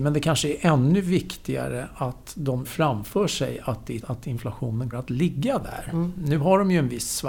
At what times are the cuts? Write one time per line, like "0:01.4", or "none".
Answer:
0:02.6
0:04.0
0:04.9